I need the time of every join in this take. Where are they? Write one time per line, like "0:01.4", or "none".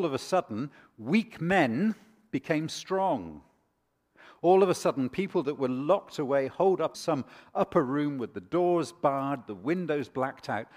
0:06.9